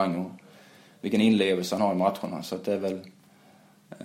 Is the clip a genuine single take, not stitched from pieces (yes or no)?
yes